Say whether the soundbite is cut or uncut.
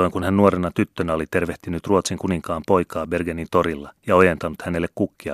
cut